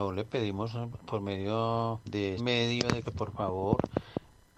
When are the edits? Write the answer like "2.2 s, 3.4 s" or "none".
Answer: 2.4 s, 3.0 s